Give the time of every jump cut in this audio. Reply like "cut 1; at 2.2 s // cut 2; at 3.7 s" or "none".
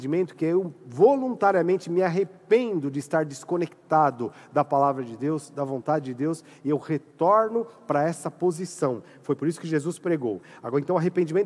none